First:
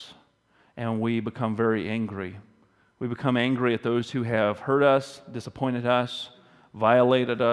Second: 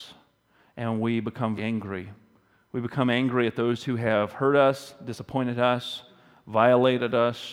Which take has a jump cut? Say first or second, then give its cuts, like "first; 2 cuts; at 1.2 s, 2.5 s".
second; 1 cut; at 1.6 s